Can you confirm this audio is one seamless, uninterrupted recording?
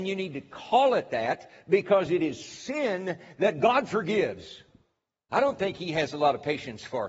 yes; 0 cuts

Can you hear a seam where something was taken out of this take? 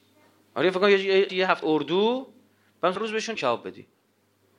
yes; 4 cuts; at 1.3 s, 1.6 s, 3.0 s, 3.4 s

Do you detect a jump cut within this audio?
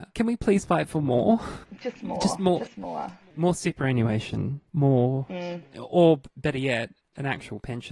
no; 0 cuts

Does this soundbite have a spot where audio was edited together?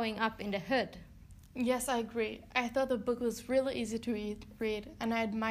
no; 0 cuts

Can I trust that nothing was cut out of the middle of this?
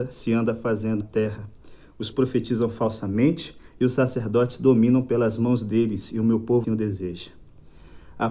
no; 4 cuts; at 1.0 s, 2.1 s, 3.7 s, 6.6 s

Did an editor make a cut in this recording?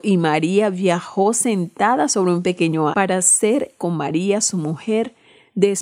yes; 2 cuts; at 2.9 s, 3.8 s

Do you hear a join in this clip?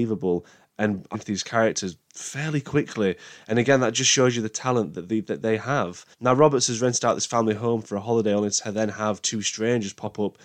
yes; 2 cuts; at 1.1 s, 6.1 s

